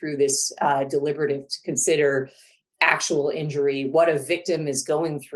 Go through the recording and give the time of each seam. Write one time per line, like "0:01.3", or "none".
0:01.5

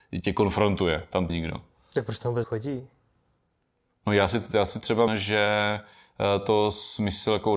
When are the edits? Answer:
0:01.3
0:02.4
0:05.1

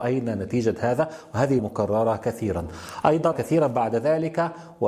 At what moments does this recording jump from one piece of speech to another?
0:01.6
0:03.3

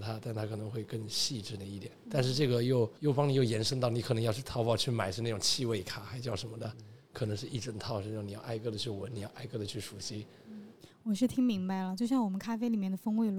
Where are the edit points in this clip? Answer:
0:02.0
0:03.0

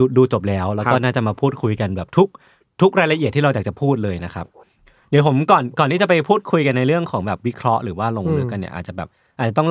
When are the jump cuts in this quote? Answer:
none

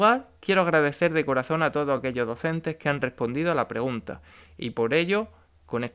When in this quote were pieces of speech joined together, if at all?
none

